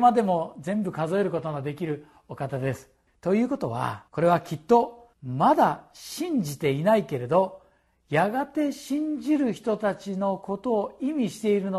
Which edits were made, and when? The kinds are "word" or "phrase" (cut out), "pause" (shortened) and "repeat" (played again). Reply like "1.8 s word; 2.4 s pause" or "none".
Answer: 3.1 s pause; 4.1 s pause; 5.1 s pause